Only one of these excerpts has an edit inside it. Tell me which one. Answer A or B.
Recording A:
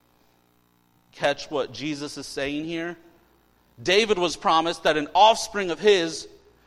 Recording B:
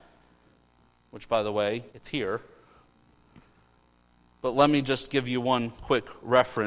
B